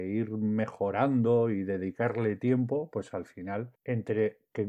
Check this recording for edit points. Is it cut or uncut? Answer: cut